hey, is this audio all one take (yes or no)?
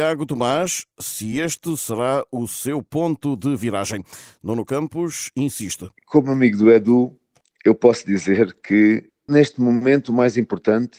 yes